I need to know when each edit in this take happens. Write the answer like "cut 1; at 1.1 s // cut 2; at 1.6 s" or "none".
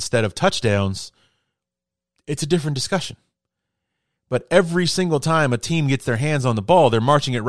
none

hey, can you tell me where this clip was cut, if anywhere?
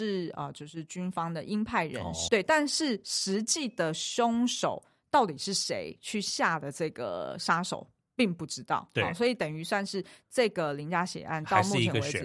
cut 1; at 2.3 s

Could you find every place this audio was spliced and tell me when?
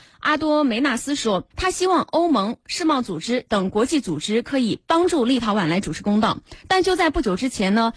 cut 1; at 1.5 s

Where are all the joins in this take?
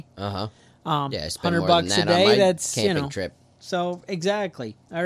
none

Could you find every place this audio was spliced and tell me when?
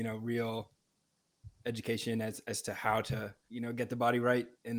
cut 1; at 3.4 s

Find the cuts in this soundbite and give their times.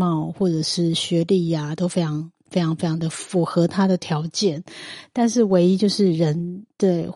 cut 1; at 1.8 s

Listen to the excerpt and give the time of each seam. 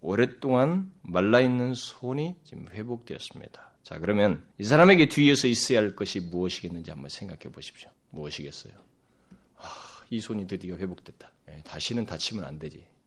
cut 1; at 3.8 s // cut 2; at 4.5 s // cut 3; at 7.9 s // cut 4; at 11.4 s

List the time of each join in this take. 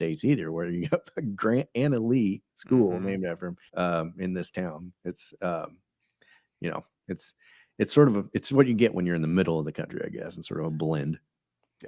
cut 1; at 3.7 s

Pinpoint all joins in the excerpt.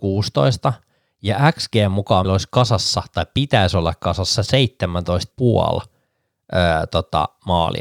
cut 1; at 2.2 s // cut 2; at 5.3 s

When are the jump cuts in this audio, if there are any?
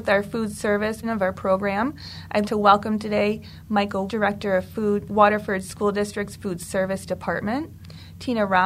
cut 1; at 1.0 s // cut 2; at 2.4 s // cut 3; at 4.1 s // cut 4; at 5.1 s

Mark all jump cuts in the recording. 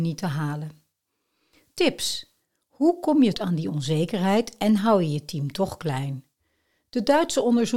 cut 1; at 3.3 s

